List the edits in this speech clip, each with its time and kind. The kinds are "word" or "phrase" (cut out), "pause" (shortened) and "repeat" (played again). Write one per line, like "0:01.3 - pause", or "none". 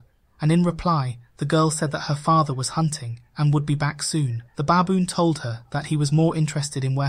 0:04.5 - pause